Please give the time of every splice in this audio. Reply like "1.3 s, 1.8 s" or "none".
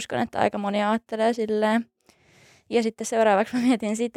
none